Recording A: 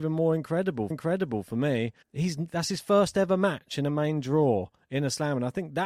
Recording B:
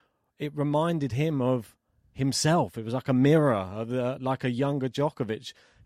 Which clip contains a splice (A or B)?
A